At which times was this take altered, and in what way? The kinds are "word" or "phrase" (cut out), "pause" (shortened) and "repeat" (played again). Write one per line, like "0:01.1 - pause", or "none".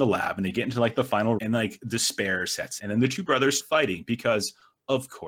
0:01.4 - word
0:02.8 - word
0:03.6 - word